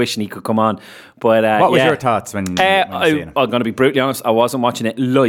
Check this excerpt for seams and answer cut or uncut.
uncut